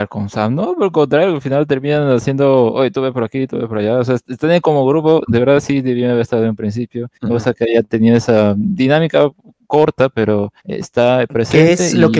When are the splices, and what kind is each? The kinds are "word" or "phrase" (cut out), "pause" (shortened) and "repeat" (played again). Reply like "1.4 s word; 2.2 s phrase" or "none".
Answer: 7.1 s pause; 10.6 s pause

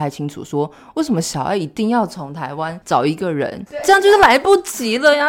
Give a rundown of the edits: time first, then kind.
2.8 s pause

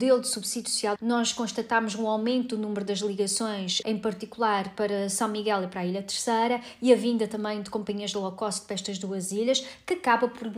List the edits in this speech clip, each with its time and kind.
1.0 s word; 3.8 s word

